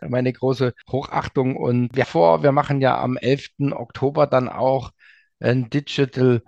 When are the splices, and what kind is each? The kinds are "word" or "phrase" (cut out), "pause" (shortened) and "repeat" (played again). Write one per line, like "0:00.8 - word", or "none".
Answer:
0:02.0 - phrase